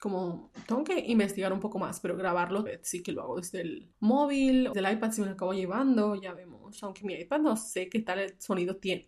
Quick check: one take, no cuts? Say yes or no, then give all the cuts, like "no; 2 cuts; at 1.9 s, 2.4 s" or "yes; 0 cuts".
no; 3 cuts; at 2.7 s, 3.9 s, 4.7 s